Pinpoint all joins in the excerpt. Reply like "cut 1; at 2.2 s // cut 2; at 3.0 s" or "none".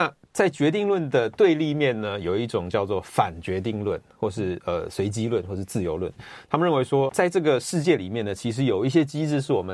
cut 1; at 7.1 s